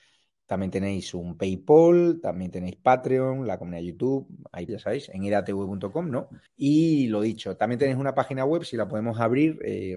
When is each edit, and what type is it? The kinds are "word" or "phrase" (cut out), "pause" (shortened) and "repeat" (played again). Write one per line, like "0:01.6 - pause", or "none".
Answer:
0:04.7 - phrase
0:06.5 - pause